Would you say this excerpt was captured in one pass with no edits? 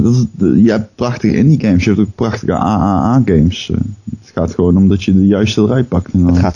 yes; 0 cuts

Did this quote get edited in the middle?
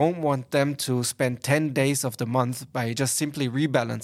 no; 0 cuts

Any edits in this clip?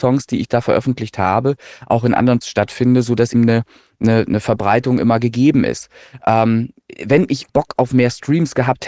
yes; 3 cuts; at 2.4 s, 3.3 s, 7.5 s

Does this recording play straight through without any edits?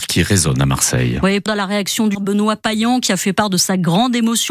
no; 2 cuts; at 1.5 s, 2.1 s

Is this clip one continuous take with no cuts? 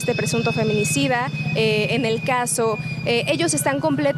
yes; 0 cuts

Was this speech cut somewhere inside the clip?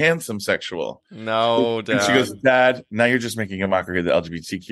no; 0 cuts

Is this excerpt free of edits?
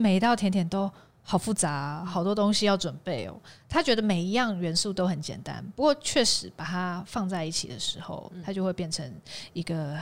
yes; 0 cuts

